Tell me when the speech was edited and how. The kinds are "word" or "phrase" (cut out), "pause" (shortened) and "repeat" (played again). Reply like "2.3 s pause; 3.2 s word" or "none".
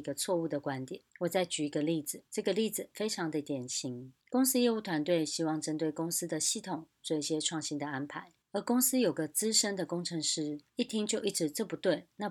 1.1 s pause; 2.3 s pause; 4.2 s pause; 8.4 s pause; 10.7 s pause